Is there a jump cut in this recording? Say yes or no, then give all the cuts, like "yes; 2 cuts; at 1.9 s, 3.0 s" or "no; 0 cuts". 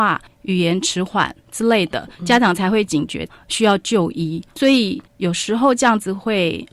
yes; 1 cut; at 5.1 s